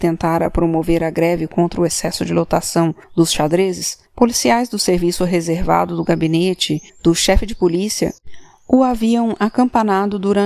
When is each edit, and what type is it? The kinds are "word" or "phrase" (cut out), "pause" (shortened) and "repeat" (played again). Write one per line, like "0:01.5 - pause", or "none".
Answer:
0:03.0 - pause
0:04.1 - pause
0:06.9 - pause